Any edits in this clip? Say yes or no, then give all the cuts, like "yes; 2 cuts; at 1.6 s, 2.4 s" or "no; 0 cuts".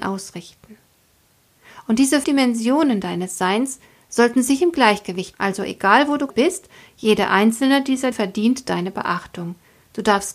yes; 4 cuts; at 2.2 s, 5.3 s, 6.3 s, 8.1 s